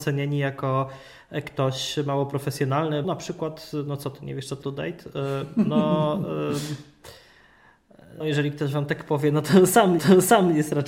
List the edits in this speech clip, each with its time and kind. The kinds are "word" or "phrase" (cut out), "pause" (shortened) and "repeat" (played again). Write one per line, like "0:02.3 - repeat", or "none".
0:03.0 - word
0:04.6 - phrase
0:08.2 - word
0:10.0 - repeat